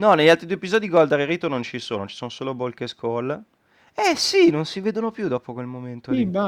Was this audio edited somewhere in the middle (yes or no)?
no